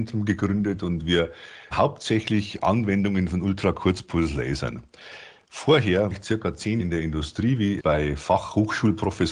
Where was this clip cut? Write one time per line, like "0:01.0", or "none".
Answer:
0:01.7
0:06.1
0:06.8
0:07.8